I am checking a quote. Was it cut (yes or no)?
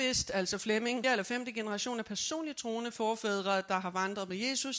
yes